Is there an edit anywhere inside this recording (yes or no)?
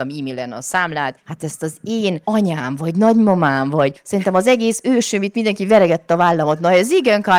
yes